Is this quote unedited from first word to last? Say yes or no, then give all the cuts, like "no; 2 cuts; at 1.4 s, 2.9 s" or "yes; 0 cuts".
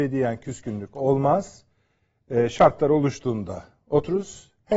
yes; 0 cuts